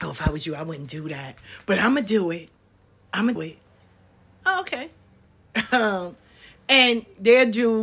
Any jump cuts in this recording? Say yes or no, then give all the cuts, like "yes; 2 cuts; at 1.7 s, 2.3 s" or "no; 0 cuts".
yes; 1 cut; at 3.4 s